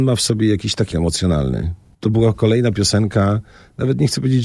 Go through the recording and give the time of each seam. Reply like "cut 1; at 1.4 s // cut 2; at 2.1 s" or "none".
cut 1; at 0.9 s